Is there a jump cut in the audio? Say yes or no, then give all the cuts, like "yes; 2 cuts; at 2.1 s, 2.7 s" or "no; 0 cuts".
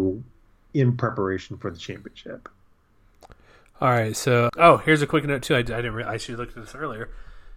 yes; 1 cut; at 4.5 s